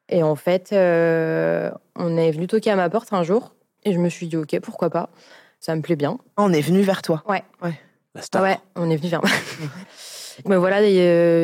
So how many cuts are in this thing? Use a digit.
1